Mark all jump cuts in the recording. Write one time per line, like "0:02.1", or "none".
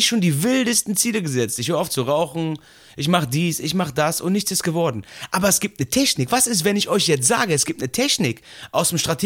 none